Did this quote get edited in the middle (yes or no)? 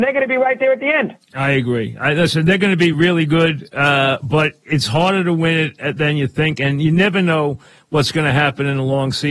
no